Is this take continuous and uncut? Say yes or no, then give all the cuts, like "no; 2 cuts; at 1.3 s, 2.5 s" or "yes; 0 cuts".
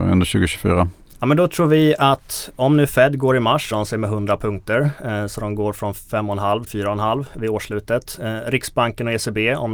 no; 2 cuts; at 3.7 s, 6.7 s